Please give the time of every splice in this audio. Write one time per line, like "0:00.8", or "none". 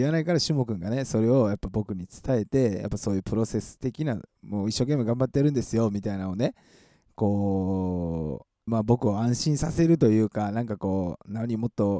0:08.7